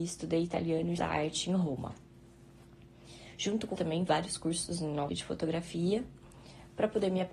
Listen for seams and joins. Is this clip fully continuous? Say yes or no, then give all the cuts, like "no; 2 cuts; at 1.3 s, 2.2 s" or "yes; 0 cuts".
no; 4 cuts; at 1.0 s, 3.7 s, 4.1 s, 5.1 s